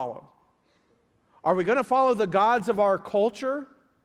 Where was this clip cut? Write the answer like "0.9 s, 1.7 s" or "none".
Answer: none